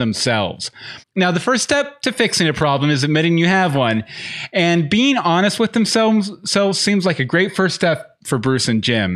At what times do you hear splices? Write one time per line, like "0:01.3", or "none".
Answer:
0:01.0